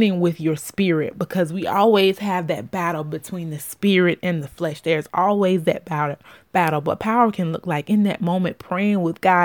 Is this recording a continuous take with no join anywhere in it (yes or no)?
yes